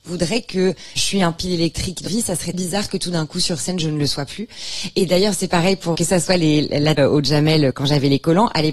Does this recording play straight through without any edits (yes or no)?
no